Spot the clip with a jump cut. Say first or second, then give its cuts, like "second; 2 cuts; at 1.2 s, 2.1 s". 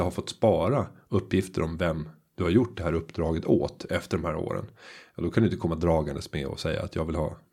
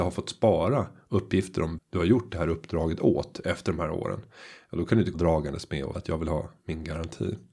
second; 3 cuts; at 1.8 s, 5.1 s, 5.9 s